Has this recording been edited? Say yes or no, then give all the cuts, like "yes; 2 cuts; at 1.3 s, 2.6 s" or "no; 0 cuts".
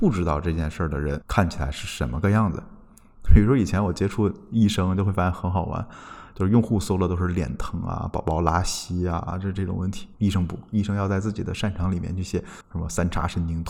yes; 1 cut; at 12.6 s